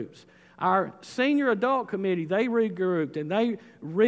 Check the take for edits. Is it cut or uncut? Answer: uncut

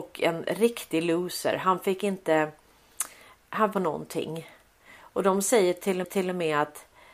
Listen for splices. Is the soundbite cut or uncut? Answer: cut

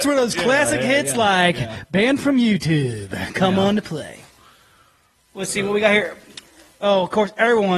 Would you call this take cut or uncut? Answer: uncut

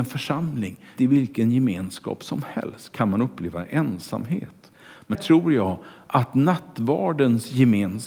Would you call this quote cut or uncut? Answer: cut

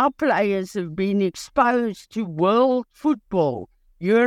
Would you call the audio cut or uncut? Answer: uncut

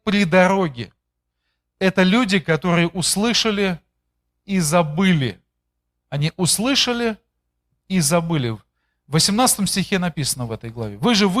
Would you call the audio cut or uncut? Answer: uncut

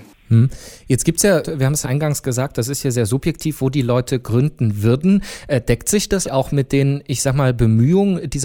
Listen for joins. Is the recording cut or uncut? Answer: cut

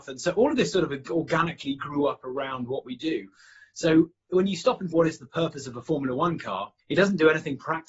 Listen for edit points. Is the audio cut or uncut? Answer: cut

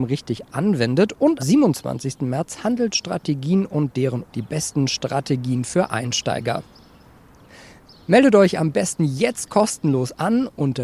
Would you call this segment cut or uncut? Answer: cut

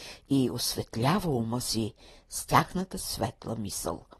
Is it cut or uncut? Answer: uncut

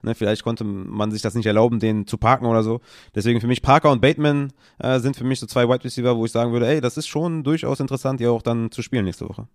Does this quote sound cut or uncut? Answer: uncut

